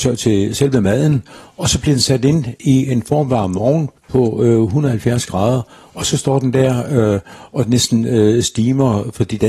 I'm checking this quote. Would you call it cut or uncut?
cut